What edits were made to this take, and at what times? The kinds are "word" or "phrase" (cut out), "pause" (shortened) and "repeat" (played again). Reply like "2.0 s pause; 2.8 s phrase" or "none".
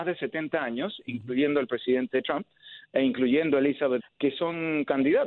4.0 s word